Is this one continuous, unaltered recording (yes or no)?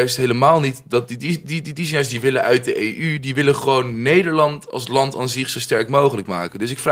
yes